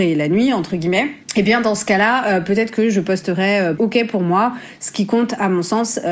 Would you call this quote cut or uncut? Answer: cut